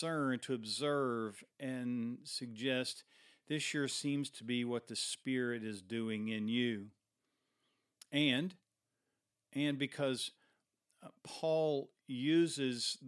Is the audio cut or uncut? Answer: uncut